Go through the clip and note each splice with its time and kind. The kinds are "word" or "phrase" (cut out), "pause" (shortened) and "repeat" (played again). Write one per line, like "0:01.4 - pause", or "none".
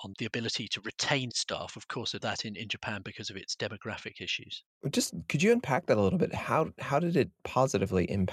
0:02.2 - phrase
0:04.7 - pause